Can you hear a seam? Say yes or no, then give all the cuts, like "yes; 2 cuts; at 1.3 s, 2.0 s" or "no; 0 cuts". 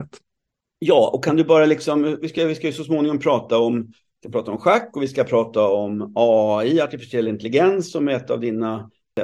no; 0 cuts